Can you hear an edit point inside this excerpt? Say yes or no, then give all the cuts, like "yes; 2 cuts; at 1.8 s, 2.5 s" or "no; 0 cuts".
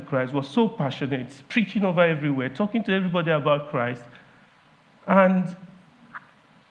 no; 0 cuts